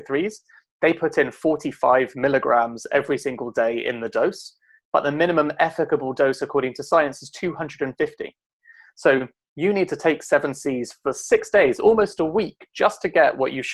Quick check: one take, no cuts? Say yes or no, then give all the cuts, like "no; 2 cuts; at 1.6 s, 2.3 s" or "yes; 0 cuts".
yes; 0 cuts